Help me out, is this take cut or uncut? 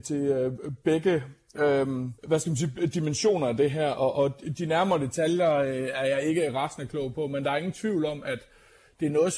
cut